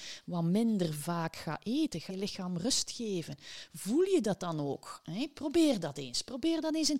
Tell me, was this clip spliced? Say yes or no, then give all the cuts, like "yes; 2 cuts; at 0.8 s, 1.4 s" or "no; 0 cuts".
yes; 1 cut; at 2.1 s